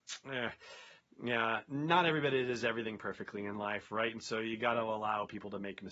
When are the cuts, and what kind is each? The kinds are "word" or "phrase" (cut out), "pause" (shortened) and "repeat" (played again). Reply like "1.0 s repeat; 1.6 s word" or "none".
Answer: none

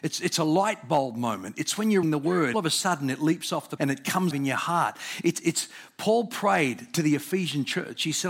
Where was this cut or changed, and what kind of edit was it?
2.0 s word; 2.5 s phrase; 3.8 s word; 4.3 s word

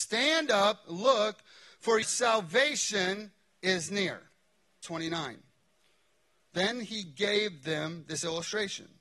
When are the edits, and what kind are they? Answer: 2.0 s word; 4.8 s word

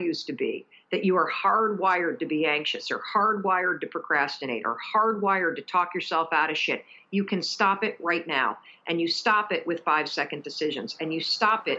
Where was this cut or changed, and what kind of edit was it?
none

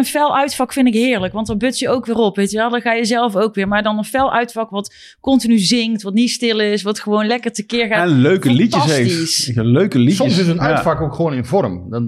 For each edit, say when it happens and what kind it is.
none

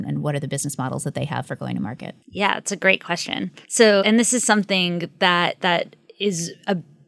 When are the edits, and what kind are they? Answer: 2.2 s pause; 3.6 s pause

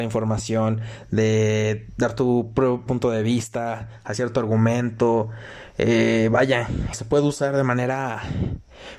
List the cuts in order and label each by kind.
2.9 s word; 6.9 s word

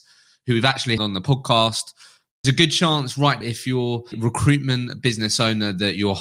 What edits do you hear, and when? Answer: 1.0 s word; 2.4 s word; 3.4 s word; 4.1 s word

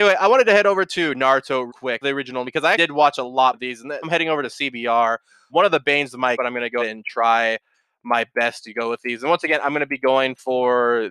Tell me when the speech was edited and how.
1.7 s word; 2.0 s word; 2.4 s word; 2.7 s word; 3.5 s word; 4.0 s word; 5.5 s word; 6.3 s word; 6.8 s word

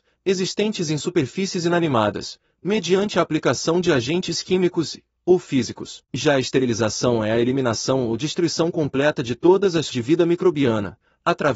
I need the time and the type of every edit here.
6.0 s pause; 9.9 s word

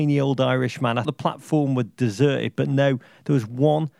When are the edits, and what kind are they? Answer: 1.0 s word

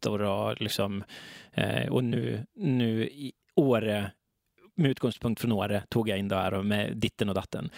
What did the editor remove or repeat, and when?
3.4 s pause

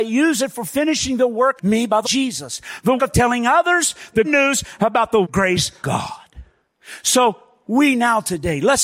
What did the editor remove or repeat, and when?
1.6 s word; 2.0 s word; 3.0 s word; 4.2 s word; 5.2 s word; 5.8 s word

